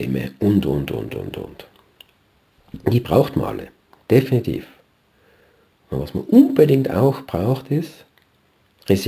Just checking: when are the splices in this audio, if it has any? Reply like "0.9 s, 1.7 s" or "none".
none

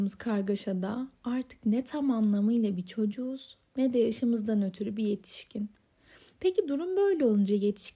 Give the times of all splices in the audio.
none

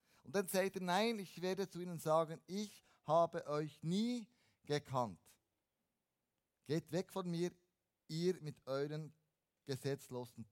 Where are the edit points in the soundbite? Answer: none

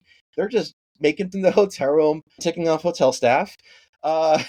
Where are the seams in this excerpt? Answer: 1.3 s, 2.4 s

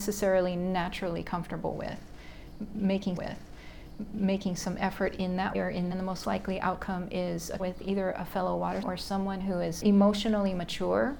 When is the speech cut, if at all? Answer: 3.2 s, 5.5 s, 5.9 s, 7.6 s, 8.8 s, 9.8 s

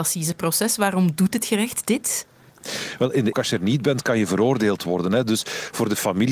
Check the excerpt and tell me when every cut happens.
3.3 s

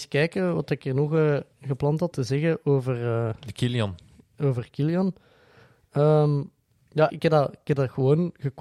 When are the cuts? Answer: 1.5 s, 2.1 s, 7.1 s

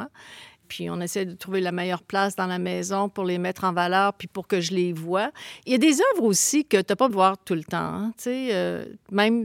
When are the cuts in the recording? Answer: 7.1 s

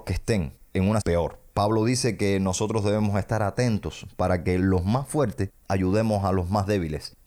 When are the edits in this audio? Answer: 1.0 s

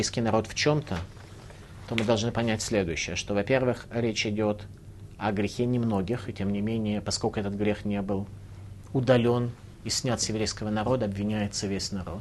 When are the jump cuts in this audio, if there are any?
none

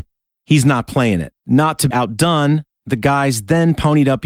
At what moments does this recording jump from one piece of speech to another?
1.4 s, 1.9 s

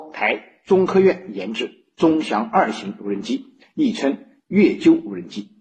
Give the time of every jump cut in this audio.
none

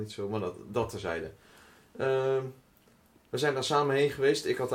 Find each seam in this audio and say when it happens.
none

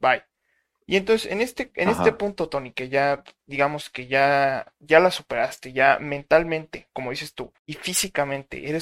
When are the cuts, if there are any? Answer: 7.6 s

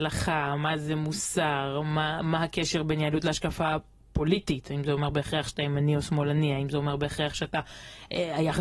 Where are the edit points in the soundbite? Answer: none

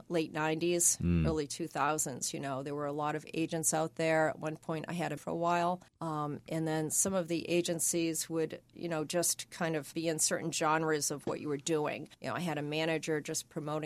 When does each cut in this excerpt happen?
5.2 s, 5.9 s, 8.7 s, 9.9 s, 12.1 s

